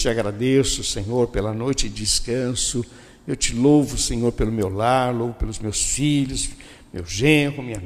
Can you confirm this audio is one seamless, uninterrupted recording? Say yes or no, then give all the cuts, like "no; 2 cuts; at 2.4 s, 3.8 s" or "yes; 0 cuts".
yes; 0 cuts